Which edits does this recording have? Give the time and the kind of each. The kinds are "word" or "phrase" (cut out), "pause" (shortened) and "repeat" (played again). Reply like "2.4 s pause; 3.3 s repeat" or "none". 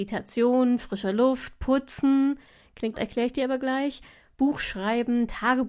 2.9 s word